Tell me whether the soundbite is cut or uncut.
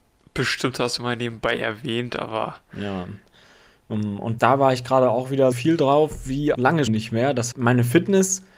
cut